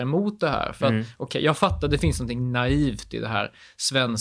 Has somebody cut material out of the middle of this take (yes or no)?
no